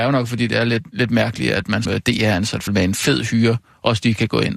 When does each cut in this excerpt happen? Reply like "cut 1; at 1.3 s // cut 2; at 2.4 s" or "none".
cut 1; at 1.9 s // cut 2; at 2.7 s